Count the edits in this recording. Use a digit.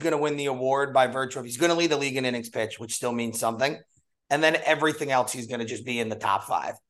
0